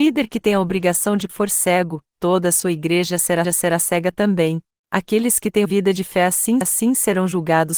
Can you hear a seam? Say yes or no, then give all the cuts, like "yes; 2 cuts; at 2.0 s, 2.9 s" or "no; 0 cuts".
yes; 5 cuts; at 1.3 s, 3.4 s, 4.7 s, 5.6 s, 6.6 s